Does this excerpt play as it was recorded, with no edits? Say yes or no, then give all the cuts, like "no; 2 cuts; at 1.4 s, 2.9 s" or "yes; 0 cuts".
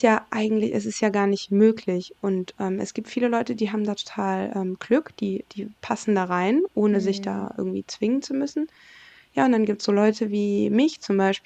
yes; 0 cuts